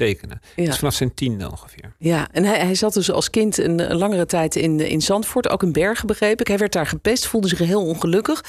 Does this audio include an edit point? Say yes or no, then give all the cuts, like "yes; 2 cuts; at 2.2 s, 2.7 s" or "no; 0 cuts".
no; 0 cuts